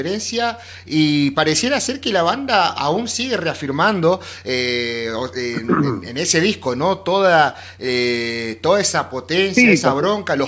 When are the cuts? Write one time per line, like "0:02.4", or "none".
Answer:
none

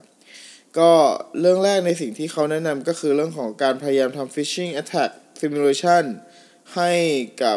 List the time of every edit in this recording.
none

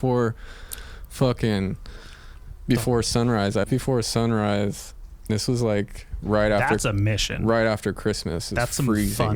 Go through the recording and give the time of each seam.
0:03.6
0:05.3

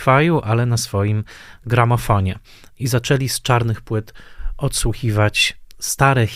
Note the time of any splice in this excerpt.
none

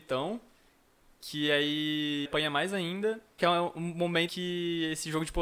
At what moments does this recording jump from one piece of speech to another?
0:02.3
0:03.4
0:04.3

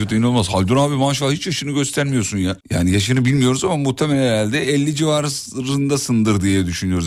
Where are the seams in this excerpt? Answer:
0:02.6

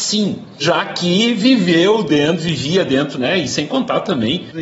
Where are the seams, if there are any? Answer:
none

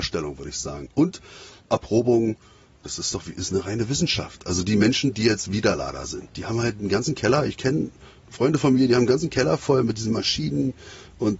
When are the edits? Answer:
none

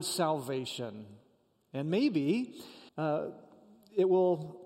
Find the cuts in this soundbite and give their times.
0:02.9

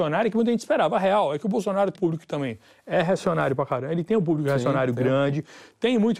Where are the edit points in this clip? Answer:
0:01.9

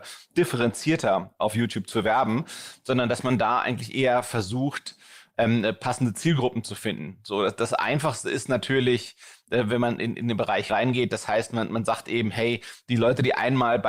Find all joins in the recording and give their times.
0:10.7

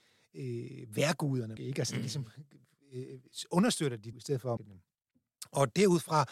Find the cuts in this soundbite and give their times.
0:01.6
0:04.1
0:04.6

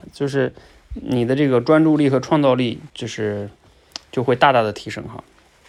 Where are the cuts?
0:02.9

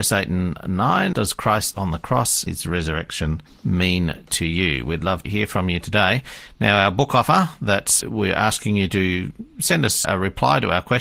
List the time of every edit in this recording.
0:01.1
0:01.7
0:02.5
0:03.5
0:05.2
0:08.0
0:10.0

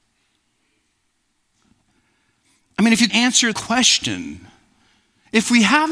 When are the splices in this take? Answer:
0:03.1
0:03.5

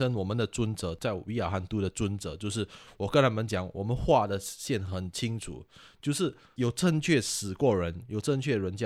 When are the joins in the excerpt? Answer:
none

